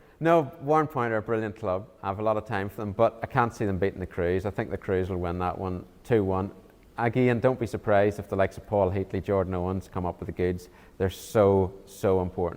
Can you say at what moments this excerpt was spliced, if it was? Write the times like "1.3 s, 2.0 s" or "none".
none